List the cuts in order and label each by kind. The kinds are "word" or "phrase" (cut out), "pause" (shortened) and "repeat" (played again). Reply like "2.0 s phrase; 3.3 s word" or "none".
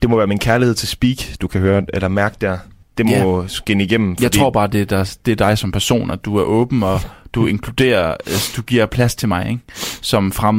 2.8 s pause

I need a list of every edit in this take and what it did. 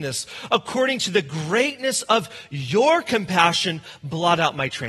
none

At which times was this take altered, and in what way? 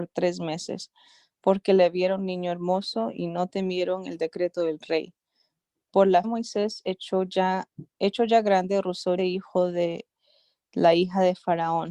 6.2 s word; 9.2 s word

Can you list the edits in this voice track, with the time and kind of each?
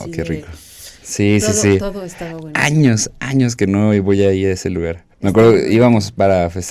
5.1 s pause

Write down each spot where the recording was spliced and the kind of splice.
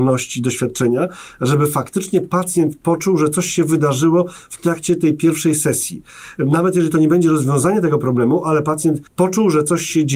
9.1 s pause

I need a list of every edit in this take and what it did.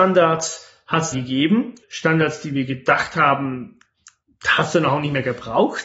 1.1 s word; 1.8 s word

